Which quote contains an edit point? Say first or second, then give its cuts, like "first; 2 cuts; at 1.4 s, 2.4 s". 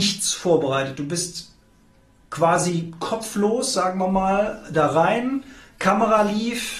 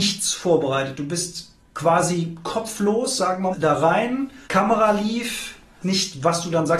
second; 4 cuts; at 1.6 s, 3.5 s, 4.4 s, 5.8 s